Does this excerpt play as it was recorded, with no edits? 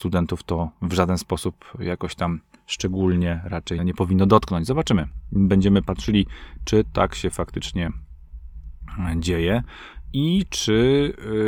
no; 1 cut; at 3.8 s

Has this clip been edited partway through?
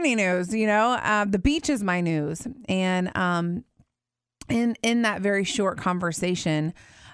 no; 0 cuts

